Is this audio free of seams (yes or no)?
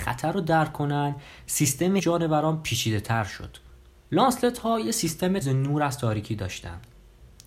no